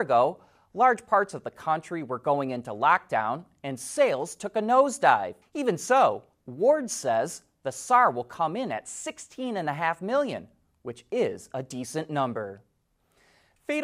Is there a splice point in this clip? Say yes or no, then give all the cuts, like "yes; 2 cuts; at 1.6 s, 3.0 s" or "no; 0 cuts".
yes; 1 cut; at 5.4 s